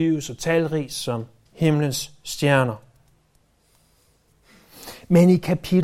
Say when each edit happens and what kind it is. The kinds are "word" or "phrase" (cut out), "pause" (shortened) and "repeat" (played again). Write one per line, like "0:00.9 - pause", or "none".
none